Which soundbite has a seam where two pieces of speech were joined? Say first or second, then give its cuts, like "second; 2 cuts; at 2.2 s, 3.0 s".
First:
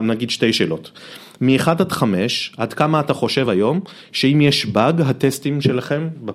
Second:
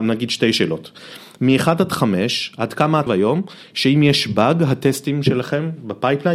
second; 1 cut; at 3.1 s